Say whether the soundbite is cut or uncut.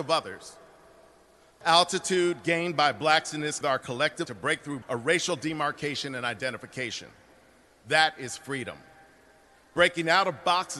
cut